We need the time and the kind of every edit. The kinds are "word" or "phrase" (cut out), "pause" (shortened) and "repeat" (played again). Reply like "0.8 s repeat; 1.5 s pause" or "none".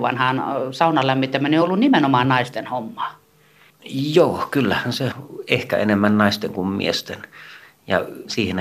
none

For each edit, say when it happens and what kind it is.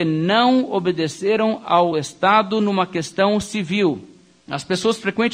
none

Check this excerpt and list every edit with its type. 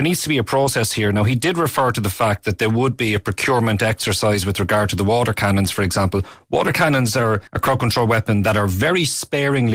7.5 s pause

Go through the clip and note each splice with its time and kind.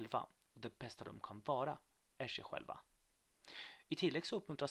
none

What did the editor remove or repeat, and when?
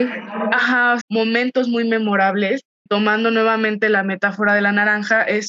1.0 s phrase; 2.9 s word

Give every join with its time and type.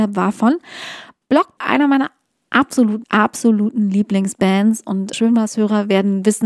1.6 s word; 3.0 s word; 5.1 s word

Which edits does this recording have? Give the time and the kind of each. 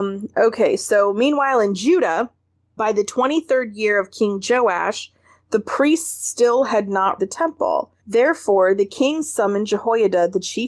2.8 s word; 7.2 s word; 8.0 s pause

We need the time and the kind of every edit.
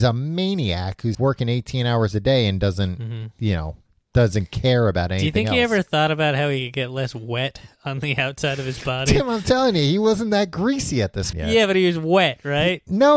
1.1 s word; 11.3 s word

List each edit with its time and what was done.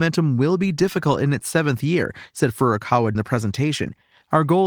3.2 s word

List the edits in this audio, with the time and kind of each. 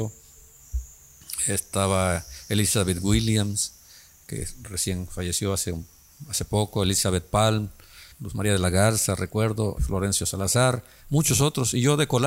8.1 s word; 9.8 s word

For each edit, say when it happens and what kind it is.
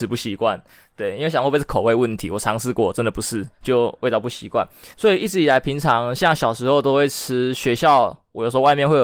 3.5 s pause; 4.9 s pause

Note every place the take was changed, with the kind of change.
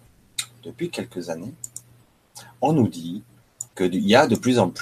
3.7 s pause

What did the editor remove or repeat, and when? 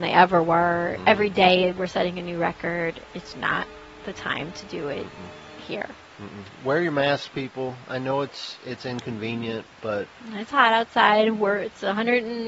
3.3 s word

